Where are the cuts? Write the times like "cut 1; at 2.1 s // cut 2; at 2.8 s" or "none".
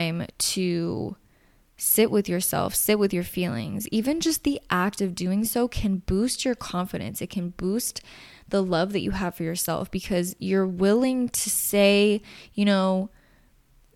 none